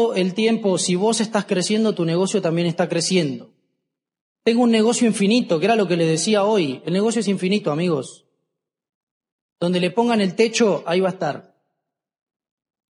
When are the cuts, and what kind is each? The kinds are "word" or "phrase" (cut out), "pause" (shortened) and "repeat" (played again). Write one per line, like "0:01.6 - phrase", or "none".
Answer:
none